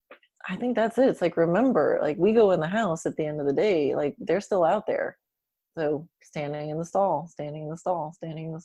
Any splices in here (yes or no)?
no